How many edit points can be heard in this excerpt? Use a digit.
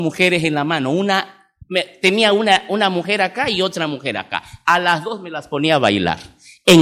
1